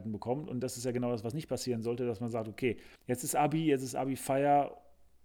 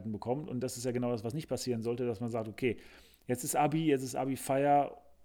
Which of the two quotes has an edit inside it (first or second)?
first